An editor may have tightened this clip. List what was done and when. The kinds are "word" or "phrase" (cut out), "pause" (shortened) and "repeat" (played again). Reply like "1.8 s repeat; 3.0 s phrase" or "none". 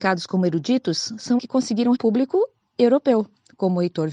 1.4 s word; 1.9 s phrase